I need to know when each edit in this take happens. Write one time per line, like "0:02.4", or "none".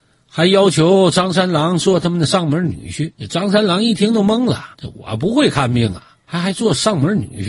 0:03.1
0:04.7
0:06.2